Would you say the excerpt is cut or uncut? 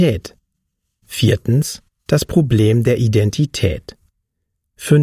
uncut